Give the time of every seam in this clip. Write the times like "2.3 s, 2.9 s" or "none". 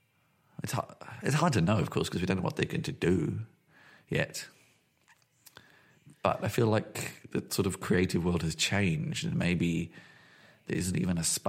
none